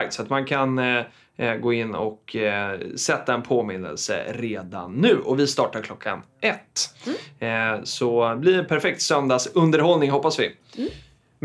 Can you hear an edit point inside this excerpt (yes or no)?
no